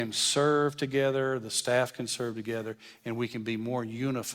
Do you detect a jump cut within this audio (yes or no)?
no